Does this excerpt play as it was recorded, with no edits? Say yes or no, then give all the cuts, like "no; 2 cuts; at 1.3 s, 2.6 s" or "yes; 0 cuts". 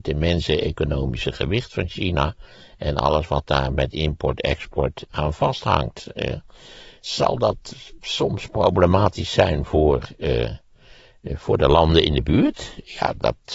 no; 1 cut; at 5.0 s